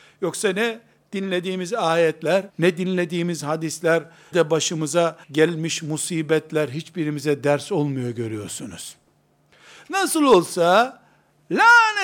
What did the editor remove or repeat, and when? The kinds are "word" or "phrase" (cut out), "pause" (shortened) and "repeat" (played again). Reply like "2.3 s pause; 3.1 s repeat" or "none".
2.5 s pause; 4.3 s word; 5.2 s pause